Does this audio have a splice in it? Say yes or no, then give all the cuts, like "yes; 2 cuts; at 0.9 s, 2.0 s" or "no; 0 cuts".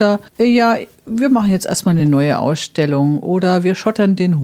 no; 0 cuts